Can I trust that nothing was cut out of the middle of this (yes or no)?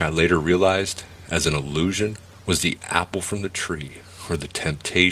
yes